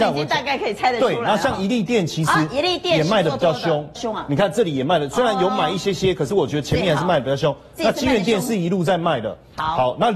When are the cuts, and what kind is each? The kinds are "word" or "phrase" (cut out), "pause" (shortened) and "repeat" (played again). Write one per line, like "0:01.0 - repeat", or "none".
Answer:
0:04.0 - word